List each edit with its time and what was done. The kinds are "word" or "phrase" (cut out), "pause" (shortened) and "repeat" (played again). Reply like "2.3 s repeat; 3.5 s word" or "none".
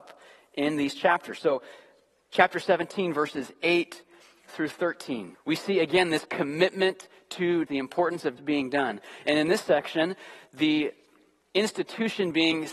5.3 s pause; 7.7 s word; 8.4 s word